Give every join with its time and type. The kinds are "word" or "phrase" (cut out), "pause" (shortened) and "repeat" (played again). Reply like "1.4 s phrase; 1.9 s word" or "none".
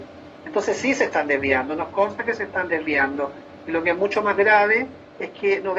none